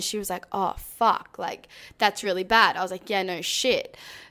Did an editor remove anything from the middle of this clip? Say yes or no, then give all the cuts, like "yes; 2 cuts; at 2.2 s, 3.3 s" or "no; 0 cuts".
no; 0 cuts